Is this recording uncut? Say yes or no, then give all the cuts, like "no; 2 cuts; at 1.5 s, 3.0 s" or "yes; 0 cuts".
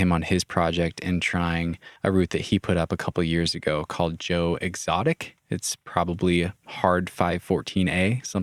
no; 2 cuts; at 2.0 s, 6.6 s